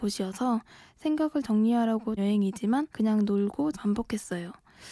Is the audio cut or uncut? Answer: cut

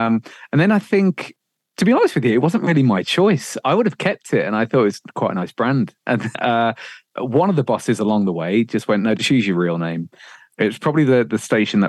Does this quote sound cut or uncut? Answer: cut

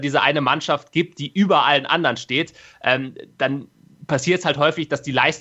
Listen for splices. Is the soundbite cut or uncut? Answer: uncut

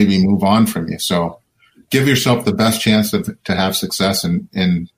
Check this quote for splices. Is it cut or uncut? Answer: uncut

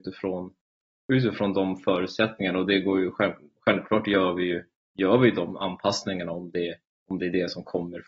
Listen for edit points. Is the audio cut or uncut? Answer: uncut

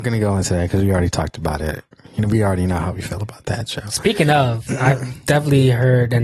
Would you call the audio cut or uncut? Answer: uncut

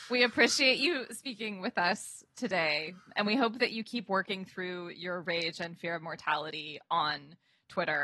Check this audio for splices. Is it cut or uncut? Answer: uncut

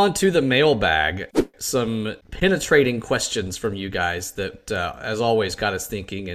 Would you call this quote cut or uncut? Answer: cut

